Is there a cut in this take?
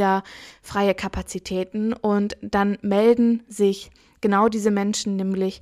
no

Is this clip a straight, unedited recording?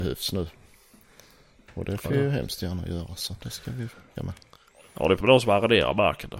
no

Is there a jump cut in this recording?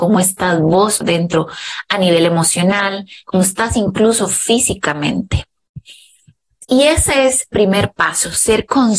yes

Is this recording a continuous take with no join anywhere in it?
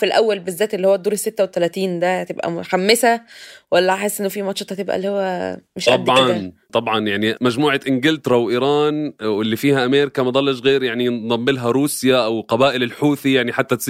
no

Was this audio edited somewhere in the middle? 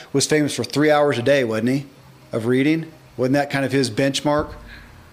no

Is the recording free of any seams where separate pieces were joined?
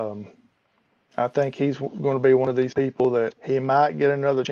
no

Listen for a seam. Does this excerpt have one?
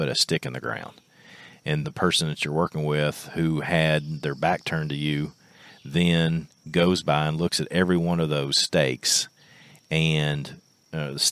yes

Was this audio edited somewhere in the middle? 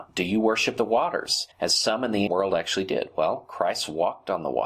yes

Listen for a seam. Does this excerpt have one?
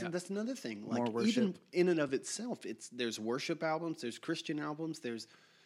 no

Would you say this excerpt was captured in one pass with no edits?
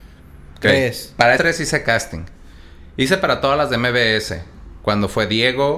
no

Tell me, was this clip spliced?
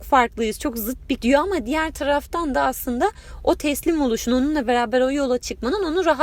yes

